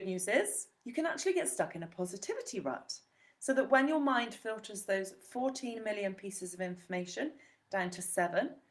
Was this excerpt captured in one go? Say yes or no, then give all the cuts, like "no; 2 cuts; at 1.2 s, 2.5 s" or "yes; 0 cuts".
yes; 0 cuts